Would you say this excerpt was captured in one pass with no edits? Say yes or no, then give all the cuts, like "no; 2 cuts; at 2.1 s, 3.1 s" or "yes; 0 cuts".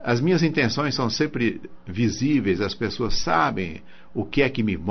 yes; 0 cuts